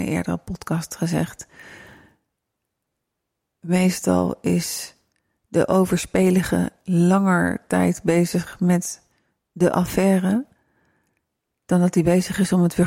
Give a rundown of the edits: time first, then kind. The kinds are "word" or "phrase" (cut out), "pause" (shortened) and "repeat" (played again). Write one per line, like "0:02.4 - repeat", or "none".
none